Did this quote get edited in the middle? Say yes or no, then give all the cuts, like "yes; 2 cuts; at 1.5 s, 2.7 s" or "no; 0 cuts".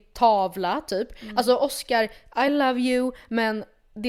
no; 0 cuts